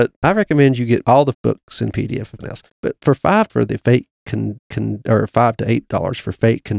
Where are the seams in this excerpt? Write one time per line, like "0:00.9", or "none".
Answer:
0:01.3
0:02.4
0:02.7
0:03.5
0:04.6